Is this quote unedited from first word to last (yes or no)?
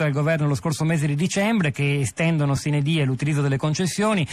yes